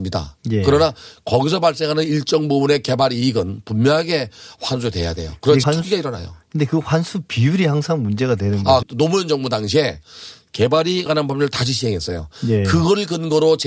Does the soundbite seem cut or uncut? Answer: cut